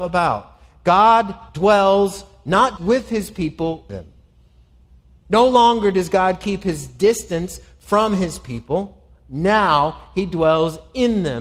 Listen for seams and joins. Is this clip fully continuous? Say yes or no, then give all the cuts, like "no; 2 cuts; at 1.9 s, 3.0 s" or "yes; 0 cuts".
no; 3 cuts; at 1.5 s, 2.8 s, 3.9 s